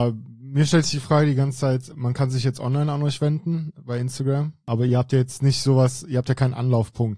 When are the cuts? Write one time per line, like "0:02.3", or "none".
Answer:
none

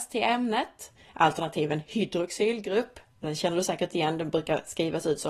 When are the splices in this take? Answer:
none

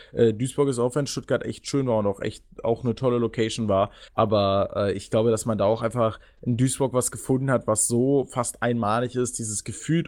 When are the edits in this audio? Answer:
0:04.1

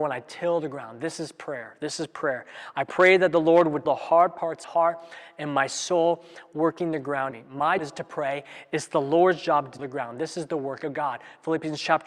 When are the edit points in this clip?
0:03.9
0:04.6
0:07.3
0:07.8
0:09.8

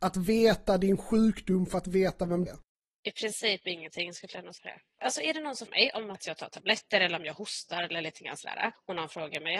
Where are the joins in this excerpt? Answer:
0:02.5
0:04.6
0:05.7
0:06.1

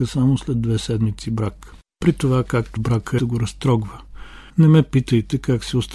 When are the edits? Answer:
0:02.8
0:03.2
0:04.5

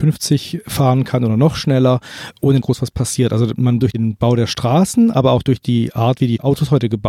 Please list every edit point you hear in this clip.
0:02.6
0:03.8

